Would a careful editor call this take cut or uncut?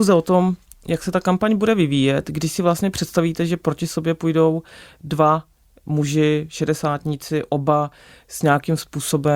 uncut